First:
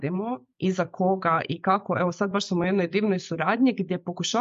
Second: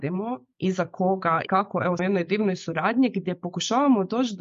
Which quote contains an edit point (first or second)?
second